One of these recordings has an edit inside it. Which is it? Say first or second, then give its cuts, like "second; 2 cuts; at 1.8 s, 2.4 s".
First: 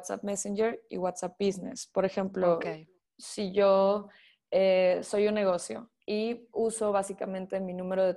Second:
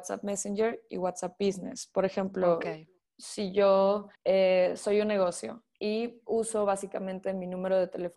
second; 1 cut; at 4.1 s